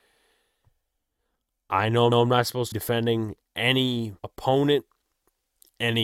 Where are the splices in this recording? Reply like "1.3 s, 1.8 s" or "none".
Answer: 2.1 s, 2.7 s, 4.2 s

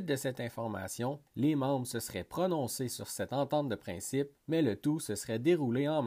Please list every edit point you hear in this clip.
1.3 s, 4.4 s

